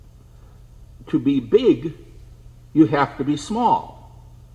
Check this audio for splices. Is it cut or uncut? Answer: uncut